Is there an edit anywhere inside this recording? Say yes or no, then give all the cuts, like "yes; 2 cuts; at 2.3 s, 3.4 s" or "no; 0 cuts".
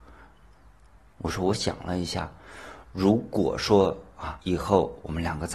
yes; 1 cut; at 4.4 s